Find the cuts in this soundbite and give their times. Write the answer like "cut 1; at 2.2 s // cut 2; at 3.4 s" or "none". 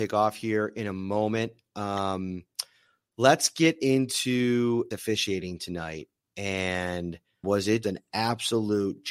cut 1; at 4.9 s // cut 2; at 7.4 s // cut 3; at 7.8 s

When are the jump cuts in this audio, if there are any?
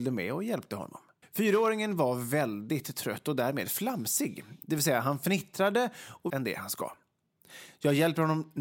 cut 1; at 1.2 s // cut 2; at 6.3 s

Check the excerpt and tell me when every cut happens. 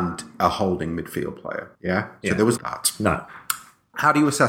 cut 1; at 1.7 s // cut 2; at 2.6 s

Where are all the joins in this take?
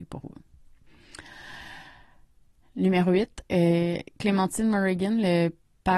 none

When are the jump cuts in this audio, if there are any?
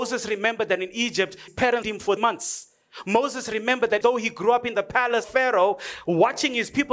cut 1; at 1.5 s // cut 2; at 1.8 s // cut 3; at 2.2 s // cut 4; at 4.0 s // cut 5; at 5.2 s

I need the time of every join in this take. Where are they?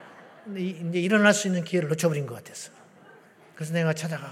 none

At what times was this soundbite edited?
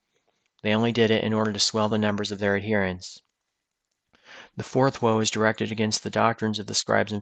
none

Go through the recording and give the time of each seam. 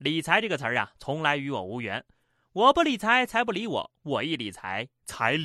none

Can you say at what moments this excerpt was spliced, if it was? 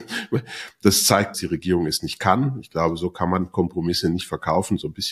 cut 1; at 1.3 s

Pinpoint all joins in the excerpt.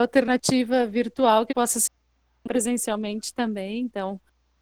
cut 1; at 1.5 s

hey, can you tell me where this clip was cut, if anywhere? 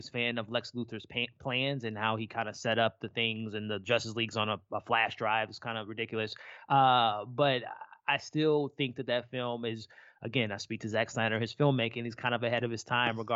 none

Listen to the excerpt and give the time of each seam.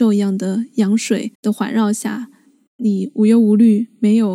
cut 1; at 1.3 s

